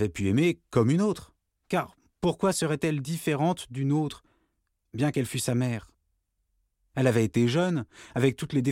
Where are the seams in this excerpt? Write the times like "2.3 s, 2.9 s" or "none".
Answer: none